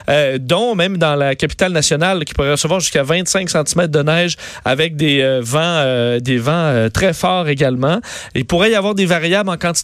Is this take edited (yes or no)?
no